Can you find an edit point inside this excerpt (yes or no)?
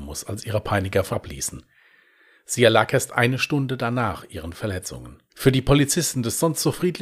yes